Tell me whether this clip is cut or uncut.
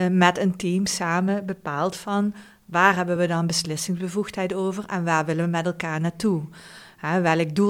uncut